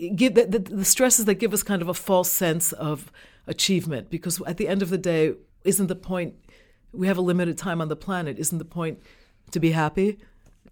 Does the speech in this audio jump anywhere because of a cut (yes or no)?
yes